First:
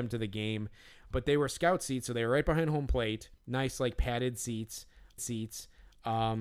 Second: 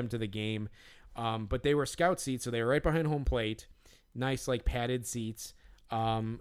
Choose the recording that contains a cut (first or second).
first